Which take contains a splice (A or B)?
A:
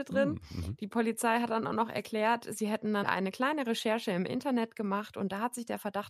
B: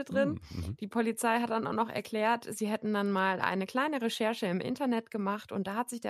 A